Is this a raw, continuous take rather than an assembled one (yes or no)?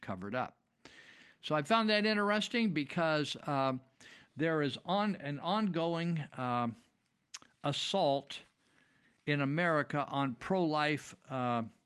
yes